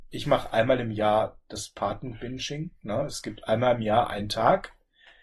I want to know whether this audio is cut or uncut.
uncut